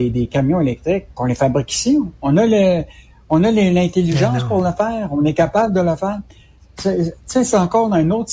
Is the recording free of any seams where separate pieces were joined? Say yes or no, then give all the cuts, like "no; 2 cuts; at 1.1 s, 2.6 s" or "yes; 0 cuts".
yes; 0 cuts